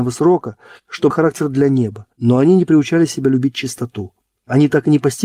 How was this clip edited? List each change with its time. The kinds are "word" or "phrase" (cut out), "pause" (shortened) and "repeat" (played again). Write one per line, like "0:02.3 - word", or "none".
0:01.1 - phrase
0:02.1 - pause